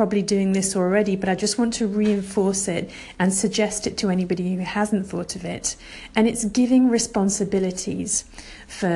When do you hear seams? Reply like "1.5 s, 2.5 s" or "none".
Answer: none